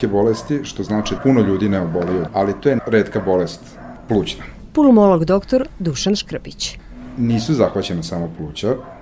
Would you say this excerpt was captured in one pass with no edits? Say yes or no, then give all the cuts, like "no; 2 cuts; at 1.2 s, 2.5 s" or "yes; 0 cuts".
no; 3 cuts; at 1.2 s, 2.3 s, 2.8 s